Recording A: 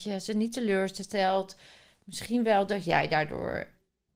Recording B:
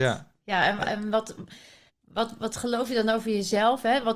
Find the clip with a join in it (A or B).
B